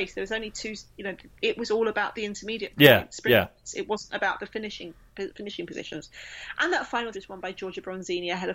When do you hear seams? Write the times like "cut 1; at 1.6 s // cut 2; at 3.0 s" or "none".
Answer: cut 1; at 1.4 s // cut 2; at 7.1 s